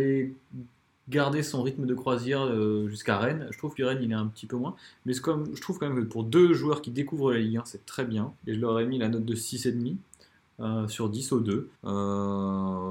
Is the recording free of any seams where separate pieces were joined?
no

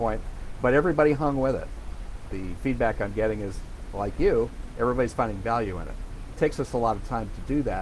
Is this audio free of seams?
yes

